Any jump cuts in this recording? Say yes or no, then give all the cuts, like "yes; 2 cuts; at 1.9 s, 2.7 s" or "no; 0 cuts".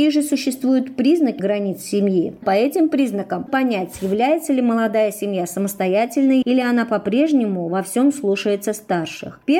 yes; 4 cuts; at 1.4 s, 2.4 s, 3.5 s, 6.4 s